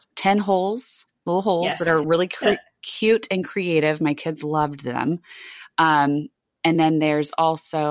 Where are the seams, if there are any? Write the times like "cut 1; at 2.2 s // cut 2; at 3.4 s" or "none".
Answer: none